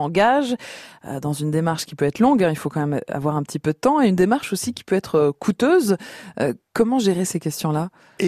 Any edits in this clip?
no; 0 cuts

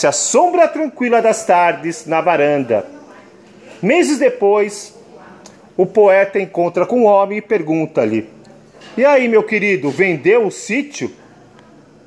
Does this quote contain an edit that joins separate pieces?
no; 0 cuts

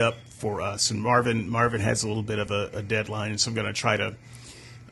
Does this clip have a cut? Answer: no; 0 cuts

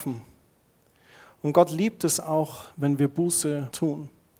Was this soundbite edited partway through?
yes; 1 cut; at 2.7 s

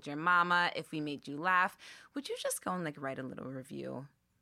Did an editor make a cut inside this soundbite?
no; 0 cuts

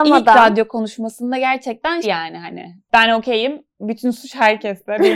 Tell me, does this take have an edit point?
yes; 1 cut; at 2.0 s

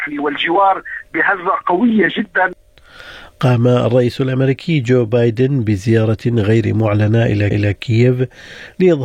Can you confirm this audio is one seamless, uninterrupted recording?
no; 1 cut; at 7.5 s

